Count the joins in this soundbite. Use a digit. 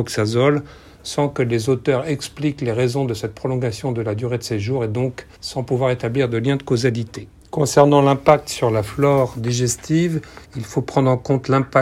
3